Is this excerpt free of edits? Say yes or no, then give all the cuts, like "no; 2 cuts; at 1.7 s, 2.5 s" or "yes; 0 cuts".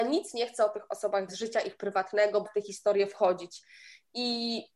no; 2 cuts; at 1.3 s, 2.4 s